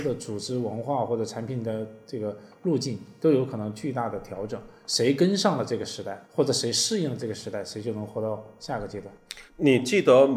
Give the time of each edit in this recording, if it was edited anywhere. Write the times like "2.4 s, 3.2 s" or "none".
6.2 s, 9.5 s